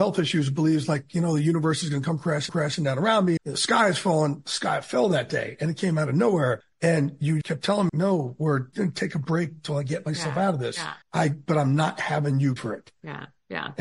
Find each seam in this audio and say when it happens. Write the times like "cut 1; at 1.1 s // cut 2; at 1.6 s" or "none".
cut 1; at 2.5 s // cut 2; at 3.4 s // cut 3; at 7.4 s // cut 4; at 7.9 s // cut 5; at 8.7 s // cut 6; at 11.0 s // cut 7; at 12.6 s